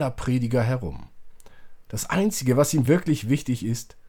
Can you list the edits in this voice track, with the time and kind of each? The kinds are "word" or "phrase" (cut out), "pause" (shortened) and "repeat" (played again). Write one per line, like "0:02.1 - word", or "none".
none

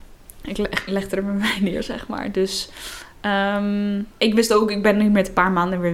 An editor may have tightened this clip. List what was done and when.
0:04.1 - pause

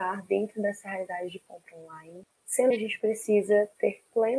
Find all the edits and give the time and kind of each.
0:02.7 - word

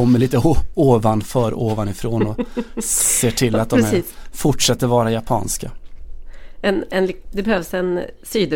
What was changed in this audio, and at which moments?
none

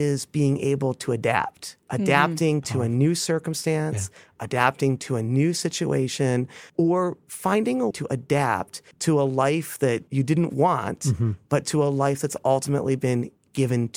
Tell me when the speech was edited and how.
0:01.8 - pause
0:06.7 - pause
0:07.9 - word
0:08.9 - pause
0:10.1 - pause

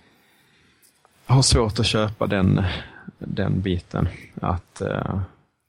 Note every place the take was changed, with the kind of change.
none

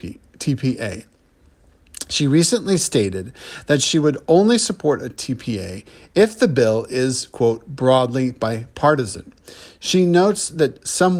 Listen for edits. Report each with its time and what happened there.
none

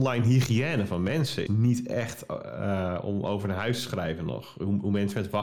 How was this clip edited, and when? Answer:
0:01.5 - word

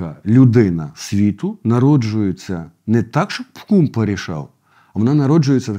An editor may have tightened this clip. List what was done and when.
none

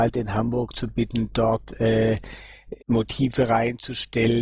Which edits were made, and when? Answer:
0:02.8 - pause

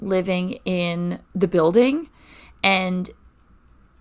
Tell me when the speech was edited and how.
0:01.2 - pause

